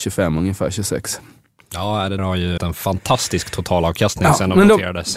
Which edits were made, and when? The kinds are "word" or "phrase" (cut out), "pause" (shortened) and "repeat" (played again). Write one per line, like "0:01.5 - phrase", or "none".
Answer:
0:02.2 - word
0:02.6 - word